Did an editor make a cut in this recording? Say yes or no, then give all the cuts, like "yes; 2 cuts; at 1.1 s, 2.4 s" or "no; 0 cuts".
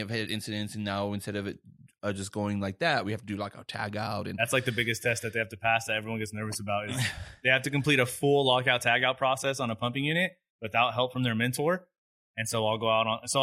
no; 0 cuts